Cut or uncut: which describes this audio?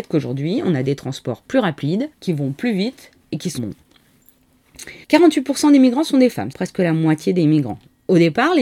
cut